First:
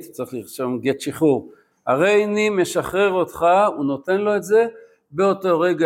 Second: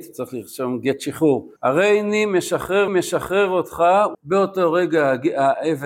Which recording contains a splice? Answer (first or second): second